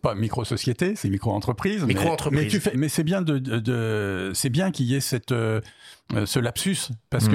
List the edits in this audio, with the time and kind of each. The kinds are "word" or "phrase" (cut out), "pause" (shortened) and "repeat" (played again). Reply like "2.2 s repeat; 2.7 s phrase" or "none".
2.7 s word